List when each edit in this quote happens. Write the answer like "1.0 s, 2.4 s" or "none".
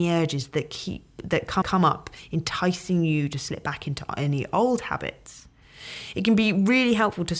1.6 s